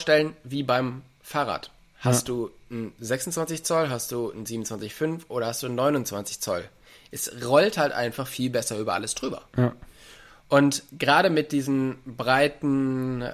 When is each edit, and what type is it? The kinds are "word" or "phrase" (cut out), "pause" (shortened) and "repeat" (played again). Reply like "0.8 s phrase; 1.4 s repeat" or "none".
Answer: none